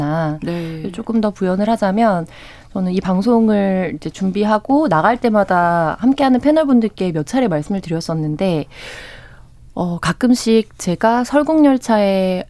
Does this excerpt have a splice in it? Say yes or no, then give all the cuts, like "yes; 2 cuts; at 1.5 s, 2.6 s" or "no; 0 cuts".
no; 0 cuts